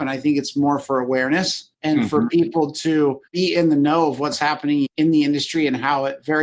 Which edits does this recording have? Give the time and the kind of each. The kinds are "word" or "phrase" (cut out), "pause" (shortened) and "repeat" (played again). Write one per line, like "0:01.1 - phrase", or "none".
0:01.7 - pause